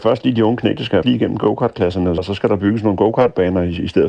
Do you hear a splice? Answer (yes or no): yes